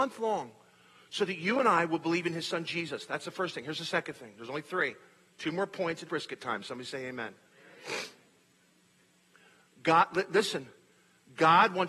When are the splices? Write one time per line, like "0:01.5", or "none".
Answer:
0:06.0